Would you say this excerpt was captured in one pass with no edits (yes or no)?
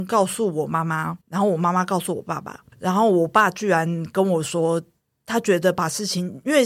no